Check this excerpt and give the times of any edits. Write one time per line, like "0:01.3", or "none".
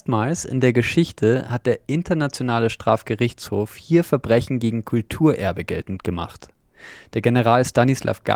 none